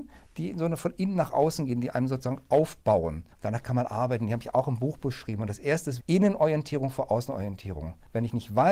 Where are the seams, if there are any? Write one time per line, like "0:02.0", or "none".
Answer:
0:06.0